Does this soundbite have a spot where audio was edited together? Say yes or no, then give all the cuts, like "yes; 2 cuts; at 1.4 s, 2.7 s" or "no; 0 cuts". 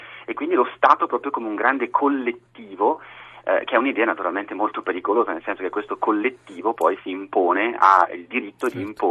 no; 0 cuts